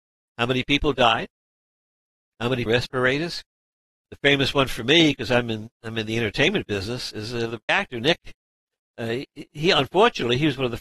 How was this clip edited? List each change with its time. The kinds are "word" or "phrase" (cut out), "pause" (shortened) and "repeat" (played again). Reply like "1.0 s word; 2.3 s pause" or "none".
2.7 s phrase; 7.7 s word